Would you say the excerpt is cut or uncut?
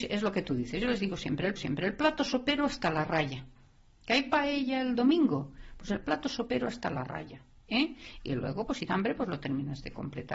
cut